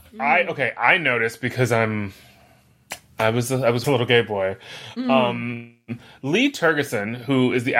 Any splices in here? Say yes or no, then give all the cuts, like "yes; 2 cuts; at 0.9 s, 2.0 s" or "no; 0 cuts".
yes; 1 cut; at 3.8 s